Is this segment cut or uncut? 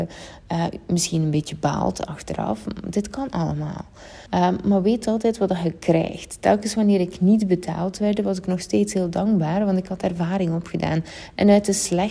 cut